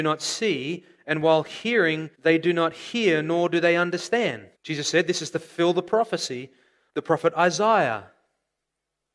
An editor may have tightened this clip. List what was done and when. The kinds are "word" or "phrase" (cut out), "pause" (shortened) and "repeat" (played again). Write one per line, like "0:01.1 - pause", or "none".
0:02.1 - pause
0:04.5 - pause
0:06.9 - word